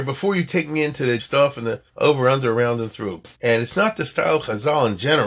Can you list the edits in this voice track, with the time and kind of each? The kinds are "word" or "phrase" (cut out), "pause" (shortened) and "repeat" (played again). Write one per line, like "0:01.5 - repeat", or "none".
0:01.2 - word
0:01.9 - pause
0:03.4 - pause